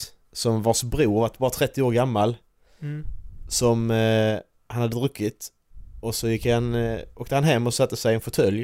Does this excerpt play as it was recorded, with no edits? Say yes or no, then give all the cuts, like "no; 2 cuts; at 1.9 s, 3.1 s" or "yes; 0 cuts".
yes; 0 cuts